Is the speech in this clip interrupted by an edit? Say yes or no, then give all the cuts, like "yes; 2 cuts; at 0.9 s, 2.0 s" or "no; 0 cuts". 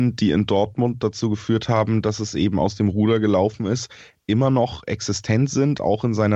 no; 0 cuts